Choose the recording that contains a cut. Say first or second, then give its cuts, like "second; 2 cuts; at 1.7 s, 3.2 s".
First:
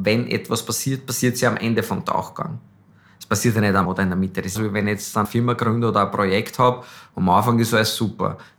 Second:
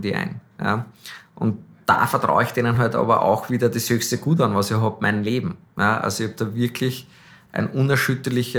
first; 3 cuts; at 3.8 s, 4.5 s, 5.2 s